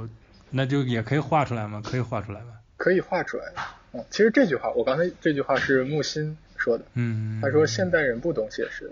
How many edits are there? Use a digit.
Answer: 3